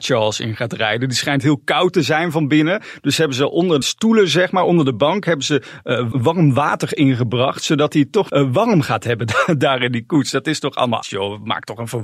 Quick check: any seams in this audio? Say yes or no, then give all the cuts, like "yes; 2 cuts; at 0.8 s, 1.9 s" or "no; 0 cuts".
yes; 4 cuts; at 3.8 s, 6.1 s, 8.3 s, 11.0 s